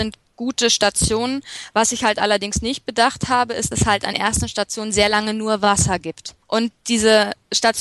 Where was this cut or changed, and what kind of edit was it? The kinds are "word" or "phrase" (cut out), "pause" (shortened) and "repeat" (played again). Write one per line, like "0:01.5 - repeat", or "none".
0:03.7 - word
0:04.1 - word
0:06.4 - pause